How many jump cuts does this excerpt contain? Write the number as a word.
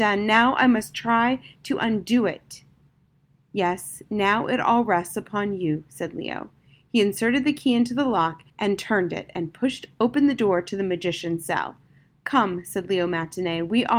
one